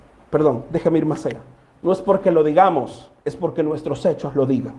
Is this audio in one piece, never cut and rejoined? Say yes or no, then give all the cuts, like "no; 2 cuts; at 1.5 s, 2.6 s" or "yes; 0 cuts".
no; 1 cut; at 3.2 s